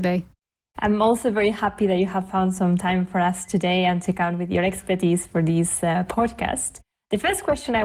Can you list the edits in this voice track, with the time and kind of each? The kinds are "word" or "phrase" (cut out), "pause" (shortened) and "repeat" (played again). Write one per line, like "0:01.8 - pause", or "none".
none